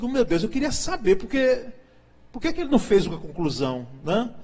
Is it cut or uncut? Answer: uncut